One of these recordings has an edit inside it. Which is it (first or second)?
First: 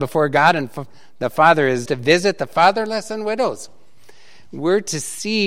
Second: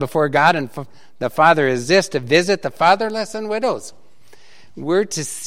first